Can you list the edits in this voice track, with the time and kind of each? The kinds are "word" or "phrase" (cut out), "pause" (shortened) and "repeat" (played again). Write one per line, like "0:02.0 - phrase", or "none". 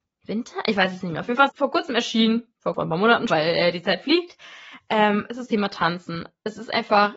0:01.5 - word
0:02.7 - word
0:03.3 - word
0:05.5 - word